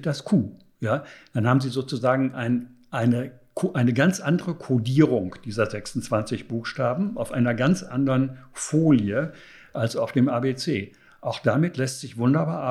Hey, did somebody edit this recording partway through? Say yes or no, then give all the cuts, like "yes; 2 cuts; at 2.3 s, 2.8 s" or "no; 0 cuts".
no; 0 cuts